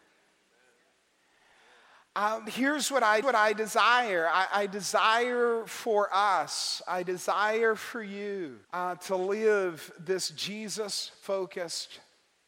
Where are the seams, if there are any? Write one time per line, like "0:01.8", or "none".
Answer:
0:02.5
0:03.2
0:08.6